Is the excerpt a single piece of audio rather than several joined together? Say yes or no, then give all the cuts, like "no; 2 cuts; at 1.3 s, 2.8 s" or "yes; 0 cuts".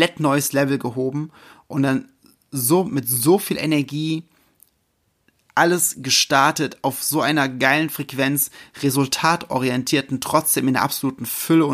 yes; 0 cuts